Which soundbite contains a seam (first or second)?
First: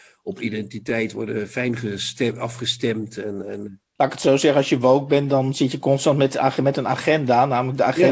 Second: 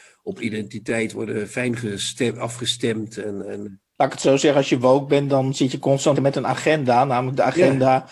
second